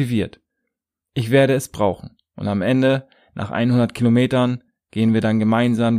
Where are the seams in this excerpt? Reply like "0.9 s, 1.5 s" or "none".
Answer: none